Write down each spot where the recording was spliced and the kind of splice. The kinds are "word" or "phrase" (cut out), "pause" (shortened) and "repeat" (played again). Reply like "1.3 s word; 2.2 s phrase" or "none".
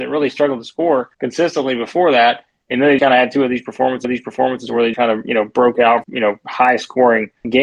1.1 s pause; 3.0 s word; 4.0 s repeat; 4.9 s word; 6.0 s phrase